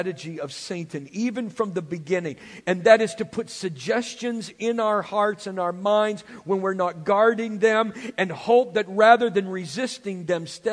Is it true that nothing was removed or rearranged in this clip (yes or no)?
yes